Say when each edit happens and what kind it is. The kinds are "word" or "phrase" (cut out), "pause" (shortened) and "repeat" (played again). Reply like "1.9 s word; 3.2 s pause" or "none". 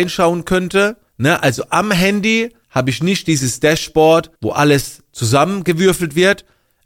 1.1 s pause; 2.6 s pause; 4.3 s pause